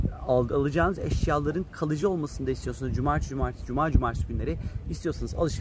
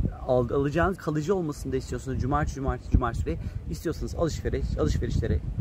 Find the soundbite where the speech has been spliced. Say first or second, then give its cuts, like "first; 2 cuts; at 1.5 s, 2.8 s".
second; 3 cuts; at 1.0 s, 2.9 s, 3.3 s